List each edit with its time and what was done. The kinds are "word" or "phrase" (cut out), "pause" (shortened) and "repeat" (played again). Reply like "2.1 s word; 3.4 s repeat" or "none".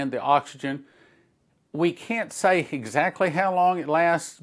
none